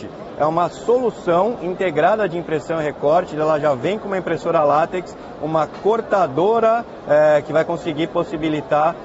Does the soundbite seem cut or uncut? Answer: uncut